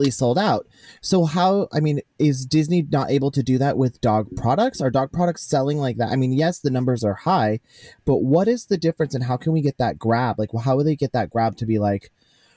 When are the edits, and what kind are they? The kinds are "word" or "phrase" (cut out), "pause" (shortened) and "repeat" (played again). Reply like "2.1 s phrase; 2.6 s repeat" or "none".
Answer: none